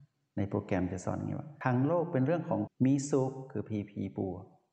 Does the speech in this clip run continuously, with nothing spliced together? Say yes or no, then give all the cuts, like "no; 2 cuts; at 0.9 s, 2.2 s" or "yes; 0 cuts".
no; 1 cut; at 2.7 s